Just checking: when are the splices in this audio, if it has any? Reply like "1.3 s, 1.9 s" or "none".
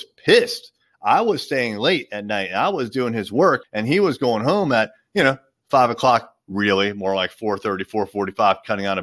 none